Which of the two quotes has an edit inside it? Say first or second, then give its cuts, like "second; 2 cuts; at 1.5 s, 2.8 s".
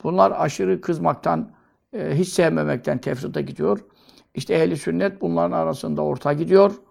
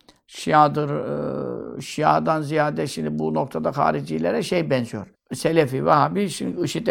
second; 1 cut; at 5.1 s